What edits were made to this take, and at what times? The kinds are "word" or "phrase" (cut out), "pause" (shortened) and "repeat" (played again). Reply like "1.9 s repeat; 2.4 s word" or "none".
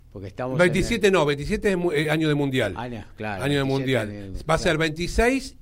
none